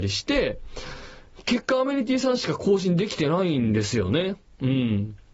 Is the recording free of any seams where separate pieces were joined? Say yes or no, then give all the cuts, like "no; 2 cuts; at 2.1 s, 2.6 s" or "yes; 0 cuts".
yes; 0 cuts